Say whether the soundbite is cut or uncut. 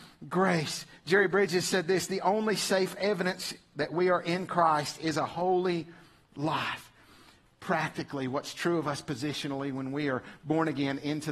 uncut